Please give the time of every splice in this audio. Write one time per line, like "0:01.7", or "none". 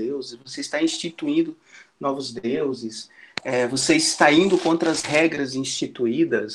none